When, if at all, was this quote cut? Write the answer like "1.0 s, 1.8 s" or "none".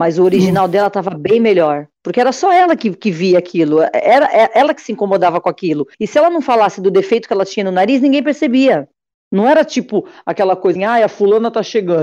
5.9 s, 9.1 s, 10.8 s